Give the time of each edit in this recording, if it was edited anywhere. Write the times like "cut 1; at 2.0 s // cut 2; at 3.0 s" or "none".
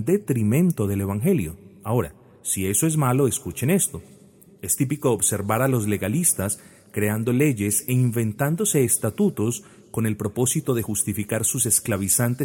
none